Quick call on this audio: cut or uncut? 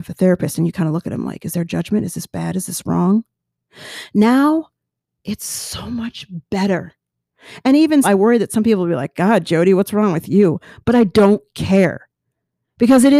cut